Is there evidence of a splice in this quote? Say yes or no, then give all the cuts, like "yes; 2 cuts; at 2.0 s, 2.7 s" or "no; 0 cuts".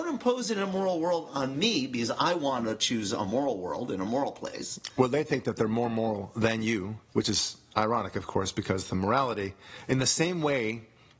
yes; 1 cut; at 7.1 s